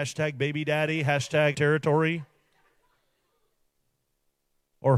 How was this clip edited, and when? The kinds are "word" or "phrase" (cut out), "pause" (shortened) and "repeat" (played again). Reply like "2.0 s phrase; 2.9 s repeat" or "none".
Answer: 1.5 s word